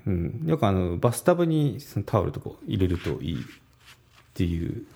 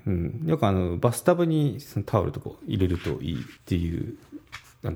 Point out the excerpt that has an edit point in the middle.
second; 1 cut; at 3.6 s

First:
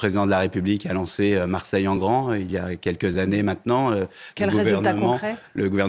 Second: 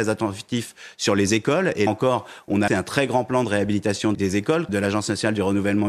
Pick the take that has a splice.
second; 4 cuts; at 1.9 s, 2.7 s, 4.1 s, 4.7 s

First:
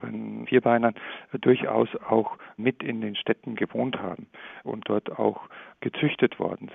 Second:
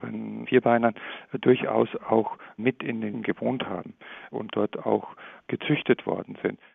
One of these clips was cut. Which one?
second; 1 cut; at 3.1 s

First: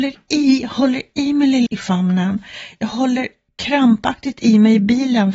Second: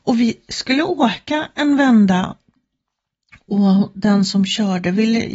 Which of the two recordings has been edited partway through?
first; 2 cuts; at 1.7 s, 3.5 s

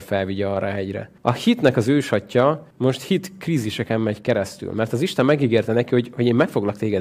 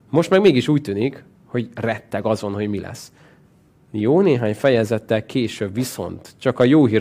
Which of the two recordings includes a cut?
first; 2 cuts; at 1.2 s, 2.7 s

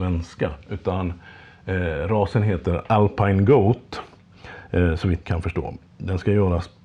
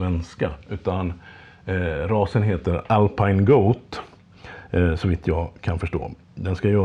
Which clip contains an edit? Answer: first; 1 cut; at 5.2 s

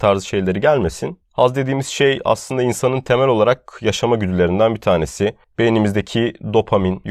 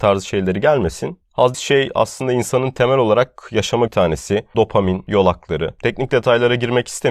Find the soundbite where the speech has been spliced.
second; 3 cuts; at 1.5 s, 3.9 s, 4.5 s

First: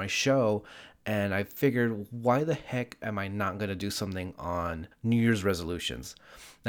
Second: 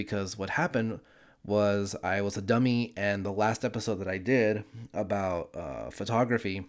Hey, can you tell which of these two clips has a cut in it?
first; 1 cut; at 4.9 s

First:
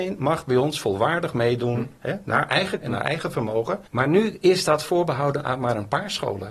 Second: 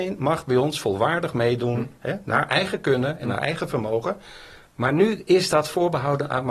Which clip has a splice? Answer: first; 2 cuts; at 2.8 s, 3.9 s

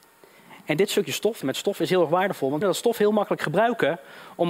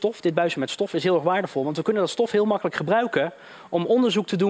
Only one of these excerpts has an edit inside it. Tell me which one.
first; 2 cuts; at 1.4 s, 2.6 s

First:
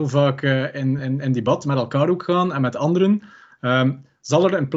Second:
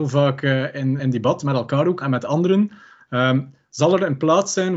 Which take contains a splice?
second; 2 cuts; at 1.0 s, 2.0 s

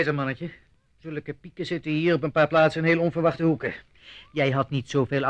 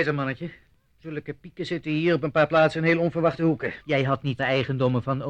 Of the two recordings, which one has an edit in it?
second; 2 cuts; at 3.8 s, 4.4 s

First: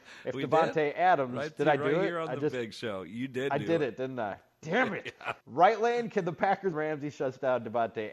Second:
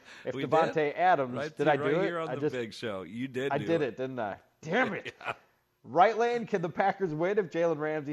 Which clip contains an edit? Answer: first; 2 cuts; at 5.4 s, 6.7 s

